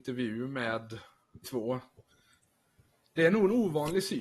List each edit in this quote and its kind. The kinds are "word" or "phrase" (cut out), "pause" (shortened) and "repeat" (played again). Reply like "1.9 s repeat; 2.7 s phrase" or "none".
1.4 s word

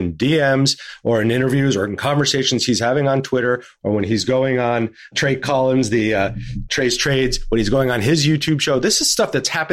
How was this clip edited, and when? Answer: none

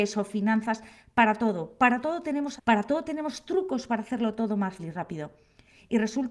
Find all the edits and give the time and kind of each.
2.6 s word; 4.8 s word

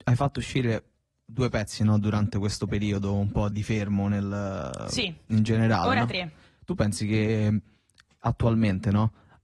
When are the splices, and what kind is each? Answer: 3.5 s word

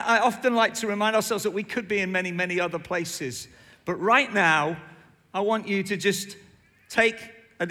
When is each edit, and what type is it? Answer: none

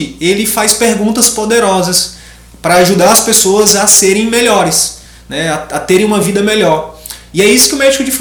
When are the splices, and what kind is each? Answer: none

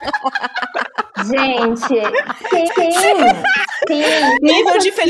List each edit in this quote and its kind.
2.7 s repeat

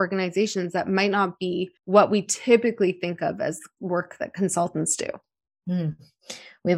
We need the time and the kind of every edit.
1.8 s pause

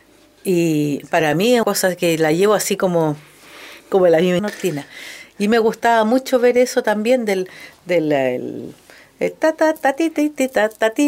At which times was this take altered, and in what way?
1.6 s word; 3.8 s pause; 4.4 s phrase

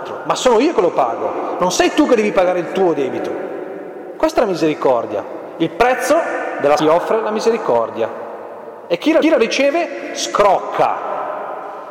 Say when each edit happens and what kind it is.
6.8 s phrase; 9.2 s repeat

